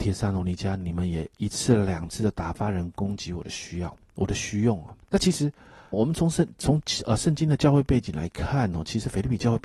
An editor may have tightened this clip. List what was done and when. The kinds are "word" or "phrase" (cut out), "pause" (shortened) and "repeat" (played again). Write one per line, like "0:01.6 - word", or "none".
0:01.3 - pause
0:05.0 - pause
0:05.9 - word